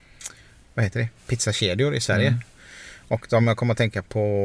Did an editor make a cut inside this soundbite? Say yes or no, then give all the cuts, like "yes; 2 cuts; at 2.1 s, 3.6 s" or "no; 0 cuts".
no; 0 cuts